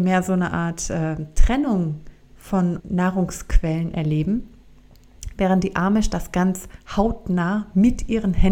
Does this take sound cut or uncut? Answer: cut